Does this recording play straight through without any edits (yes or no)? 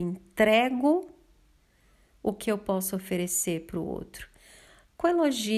yes